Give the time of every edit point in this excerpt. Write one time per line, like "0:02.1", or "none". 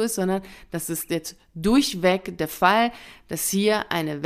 none